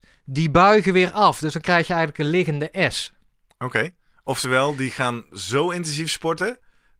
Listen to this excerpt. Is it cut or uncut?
uncut